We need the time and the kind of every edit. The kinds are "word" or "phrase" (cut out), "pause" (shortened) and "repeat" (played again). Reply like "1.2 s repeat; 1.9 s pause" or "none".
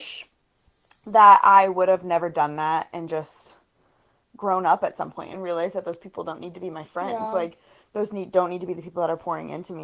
none